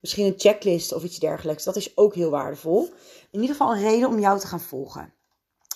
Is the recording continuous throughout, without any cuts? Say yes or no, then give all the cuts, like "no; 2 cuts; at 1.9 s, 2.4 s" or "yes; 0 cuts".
yes; 0 cuts